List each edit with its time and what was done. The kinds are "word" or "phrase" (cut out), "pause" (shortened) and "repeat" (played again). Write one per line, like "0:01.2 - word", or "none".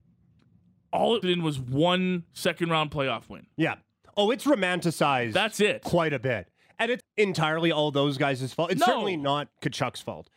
0:01.2 - word
0:07.0 - word